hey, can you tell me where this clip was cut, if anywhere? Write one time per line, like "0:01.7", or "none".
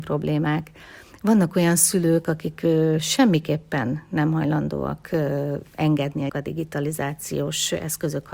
0:06.3